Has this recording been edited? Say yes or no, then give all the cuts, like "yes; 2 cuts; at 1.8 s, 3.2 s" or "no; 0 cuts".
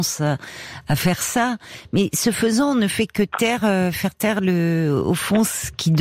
no; 0 cuts